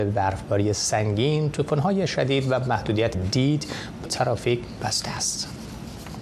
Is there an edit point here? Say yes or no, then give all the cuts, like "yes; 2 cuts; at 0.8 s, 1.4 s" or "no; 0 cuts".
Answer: yes; 2 cuts; at 3.1 s, 4.1 s